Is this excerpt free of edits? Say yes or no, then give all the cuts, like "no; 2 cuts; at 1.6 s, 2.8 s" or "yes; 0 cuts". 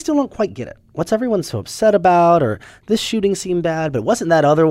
yes; 0 cuts